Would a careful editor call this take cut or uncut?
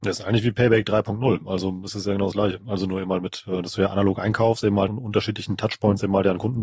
cut